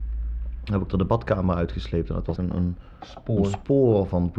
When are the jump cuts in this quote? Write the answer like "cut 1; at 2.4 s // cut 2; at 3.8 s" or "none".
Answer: cut 1; at 2.4 s